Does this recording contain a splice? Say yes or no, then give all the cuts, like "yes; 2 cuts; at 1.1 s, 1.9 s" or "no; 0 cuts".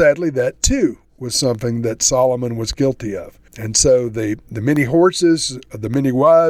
yes; 1 cut; at 3.5 s